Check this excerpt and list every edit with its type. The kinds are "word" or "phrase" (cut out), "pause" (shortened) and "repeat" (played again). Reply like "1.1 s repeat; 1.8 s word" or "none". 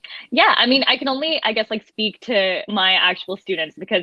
none